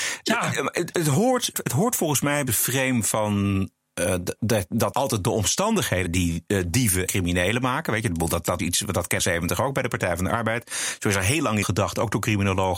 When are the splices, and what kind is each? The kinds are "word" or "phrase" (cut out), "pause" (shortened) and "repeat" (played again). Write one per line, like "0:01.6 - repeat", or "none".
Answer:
0:01.5 - word
0:02.5 - phrase
0:04.9 - word
0:06.0 - word
0:07.1 - word
0:08.6 - word
0:09.2 - phrase
0:11.6 - word